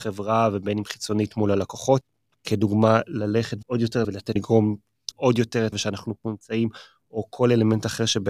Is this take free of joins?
no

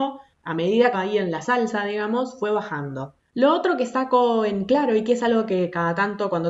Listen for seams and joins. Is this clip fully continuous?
no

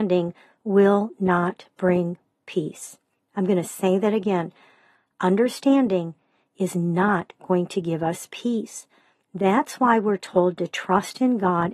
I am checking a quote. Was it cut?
no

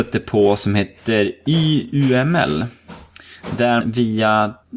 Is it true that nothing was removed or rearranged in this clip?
no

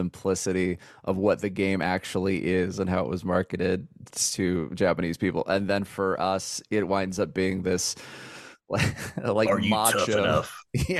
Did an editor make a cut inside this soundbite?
no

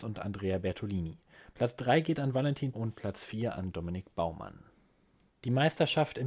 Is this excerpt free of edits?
no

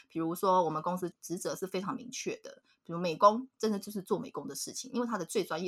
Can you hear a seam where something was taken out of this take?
no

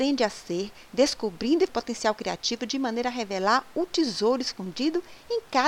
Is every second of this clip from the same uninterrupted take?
no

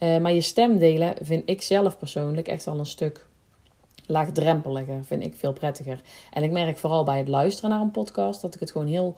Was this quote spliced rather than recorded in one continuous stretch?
no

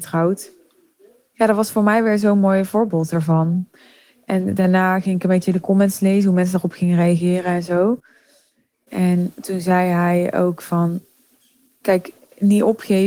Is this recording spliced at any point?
no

